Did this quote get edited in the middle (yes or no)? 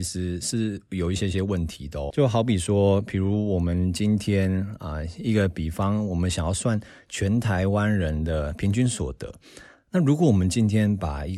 yes